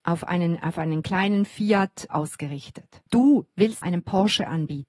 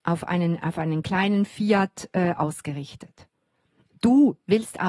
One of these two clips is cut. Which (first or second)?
first